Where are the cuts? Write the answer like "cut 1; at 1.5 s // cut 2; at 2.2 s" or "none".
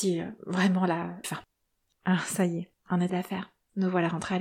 cut 1; at 1.2 s // cut 2; at 1.6 s // cut 3; at 2.8 s // cut 4; at 3.1 s